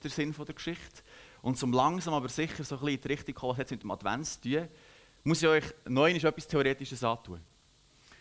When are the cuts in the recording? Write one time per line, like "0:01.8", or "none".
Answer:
none

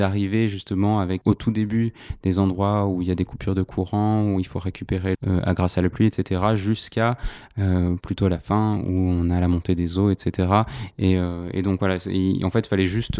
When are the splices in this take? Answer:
0:01.2
0:05.1

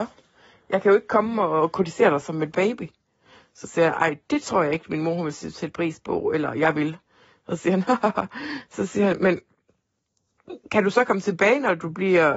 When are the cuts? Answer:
none

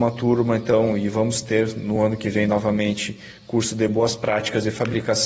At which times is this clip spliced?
none

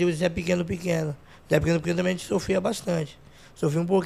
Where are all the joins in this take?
none

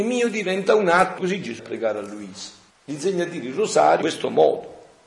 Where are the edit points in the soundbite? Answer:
0:01.2
0:01.6
0:02.7
0:04.0

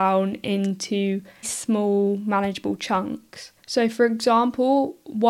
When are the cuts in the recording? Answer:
0:01.4
0:03.6

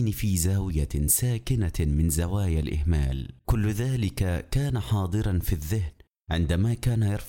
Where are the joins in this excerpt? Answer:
0:03.4

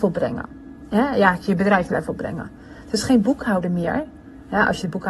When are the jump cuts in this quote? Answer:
0:01.9

